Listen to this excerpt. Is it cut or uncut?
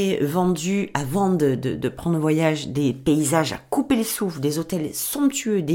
uncut